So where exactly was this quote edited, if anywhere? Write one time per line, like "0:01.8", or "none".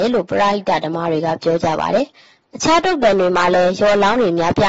none